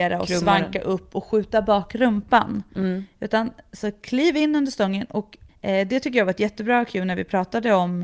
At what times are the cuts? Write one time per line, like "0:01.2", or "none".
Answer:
0:05.5